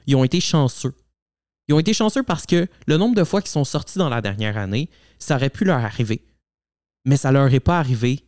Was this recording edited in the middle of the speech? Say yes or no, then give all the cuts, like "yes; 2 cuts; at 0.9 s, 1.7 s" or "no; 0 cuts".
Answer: no; 0 cuts